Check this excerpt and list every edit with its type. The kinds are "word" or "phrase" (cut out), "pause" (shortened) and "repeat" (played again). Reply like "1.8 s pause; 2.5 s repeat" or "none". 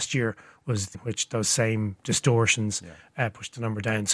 0.9 s word